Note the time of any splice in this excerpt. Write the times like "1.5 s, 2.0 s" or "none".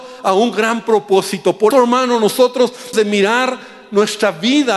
1.7 s, 2.9 s